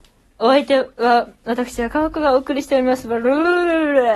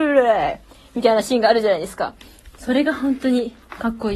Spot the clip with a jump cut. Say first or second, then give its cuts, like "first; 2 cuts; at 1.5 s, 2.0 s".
first; 1 cut; at 0.9 s